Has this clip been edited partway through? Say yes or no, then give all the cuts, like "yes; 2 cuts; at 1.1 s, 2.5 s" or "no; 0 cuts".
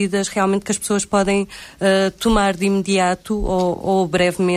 no; 0 cuts